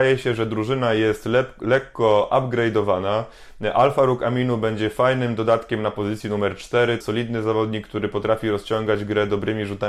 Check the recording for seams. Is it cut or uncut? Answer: cut